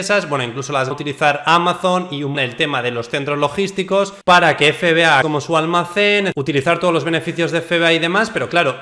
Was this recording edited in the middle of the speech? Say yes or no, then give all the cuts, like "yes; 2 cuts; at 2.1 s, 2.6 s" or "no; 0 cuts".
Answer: yes; 3 cuts; at 0.9 s, 2.3 s, 5.2 s